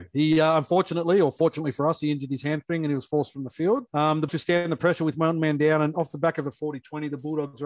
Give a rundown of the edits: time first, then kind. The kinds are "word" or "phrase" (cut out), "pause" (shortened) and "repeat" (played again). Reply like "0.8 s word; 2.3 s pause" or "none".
3.9 s pause; 4.3 s word